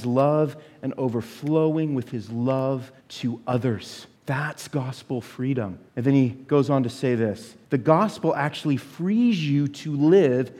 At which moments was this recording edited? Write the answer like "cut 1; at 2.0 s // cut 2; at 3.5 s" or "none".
cut 1; at 3.0 s // cut 2; at 4.2 s // cut 3; at 5.9 s // cut 4; at 7.6 s